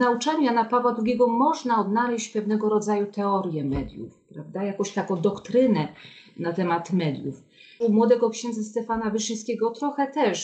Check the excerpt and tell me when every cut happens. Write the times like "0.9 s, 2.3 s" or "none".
none